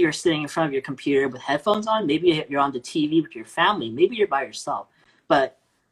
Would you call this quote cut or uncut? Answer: uncut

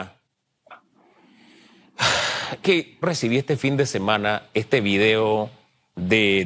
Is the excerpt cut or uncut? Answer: cut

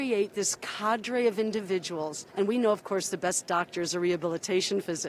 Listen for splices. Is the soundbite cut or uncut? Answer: cut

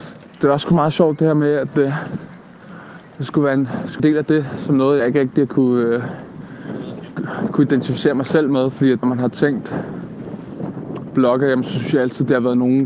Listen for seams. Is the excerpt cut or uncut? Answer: cut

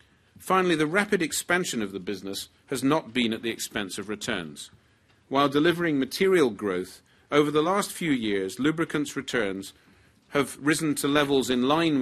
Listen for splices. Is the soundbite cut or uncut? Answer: uncut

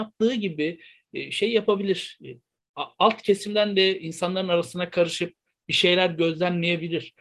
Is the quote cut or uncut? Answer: uncut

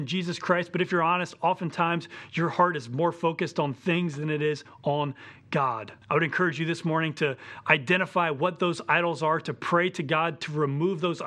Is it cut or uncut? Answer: cut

